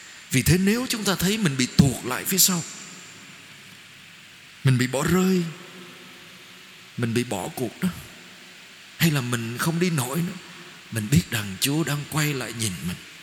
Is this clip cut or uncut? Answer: uncut